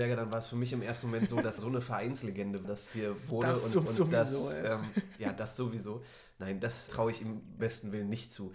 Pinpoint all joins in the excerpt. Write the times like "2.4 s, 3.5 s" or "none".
1.6 s, 2.6 s, 3.9 s, 6.9 s, 7.6 s